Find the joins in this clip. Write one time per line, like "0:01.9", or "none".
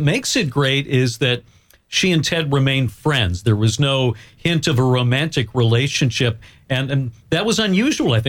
none